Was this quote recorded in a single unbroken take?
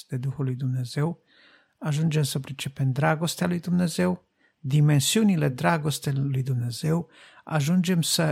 yes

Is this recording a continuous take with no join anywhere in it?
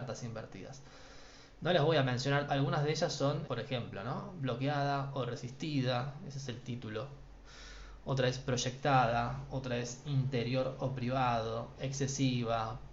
no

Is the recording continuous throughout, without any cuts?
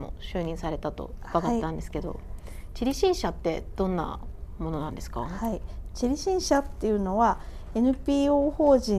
yes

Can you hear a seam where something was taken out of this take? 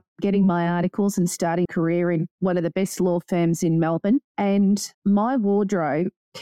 yes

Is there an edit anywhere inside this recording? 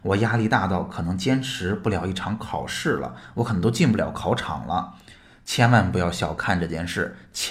no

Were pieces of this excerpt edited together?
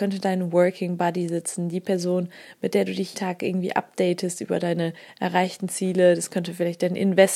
yes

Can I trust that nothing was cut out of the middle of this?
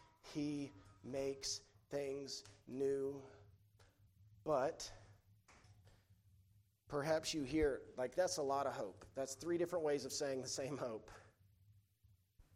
yes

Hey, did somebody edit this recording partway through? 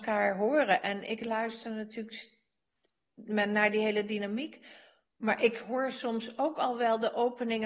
no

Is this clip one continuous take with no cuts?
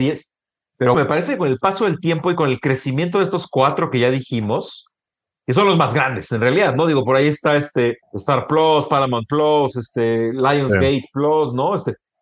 no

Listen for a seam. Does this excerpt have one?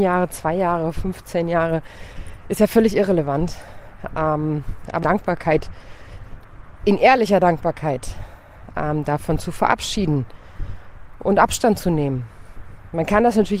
yes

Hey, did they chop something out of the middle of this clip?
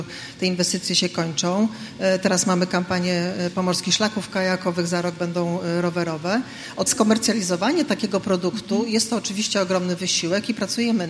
yes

